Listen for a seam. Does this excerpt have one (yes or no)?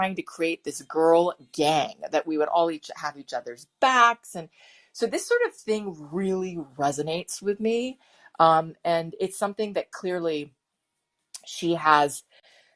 no